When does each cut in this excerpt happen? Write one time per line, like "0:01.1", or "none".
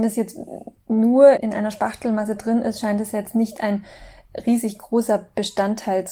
0:01.4